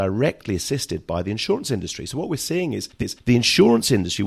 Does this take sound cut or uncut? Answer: cut